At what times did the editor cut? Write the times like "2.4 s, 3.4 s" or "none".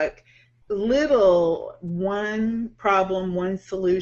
none

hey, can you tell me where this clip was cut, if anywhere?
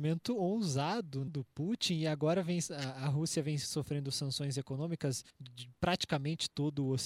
1.3 s, 5.3 s

